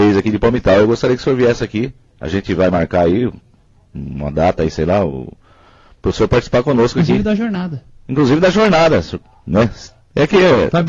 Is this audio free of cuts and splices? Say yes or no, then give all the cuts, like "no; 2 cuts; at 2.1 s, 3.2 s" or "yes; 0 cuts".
yes; 0 cuts